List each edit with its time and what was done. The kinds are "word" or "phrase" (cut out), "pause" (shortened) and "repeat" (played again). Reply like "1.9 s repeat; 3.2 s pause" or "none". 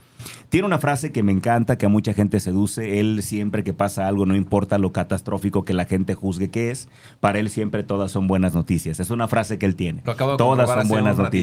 none